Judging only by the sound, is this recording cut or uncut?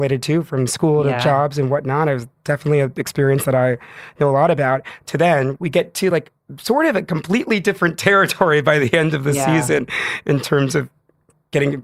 uncut